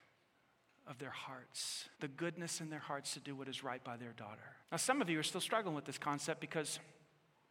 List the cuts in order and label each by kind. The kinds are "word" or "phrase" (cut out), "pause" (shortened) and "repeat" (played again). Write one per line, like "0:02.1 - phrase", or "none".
0:01.9 - pause
0:04.6 - pause